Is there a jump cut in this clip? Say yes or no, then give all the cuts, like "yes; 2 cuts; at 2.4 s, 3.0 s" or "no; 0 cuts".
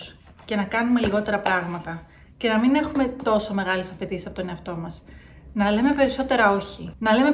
no; 0 cuts